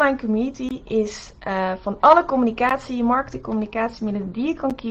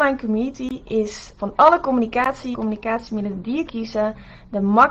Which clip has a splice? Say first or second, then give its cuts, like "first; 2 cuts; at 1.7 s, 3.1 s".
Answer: second; 3 cuts; at 1.4 s, 2.5 s, 3.7 s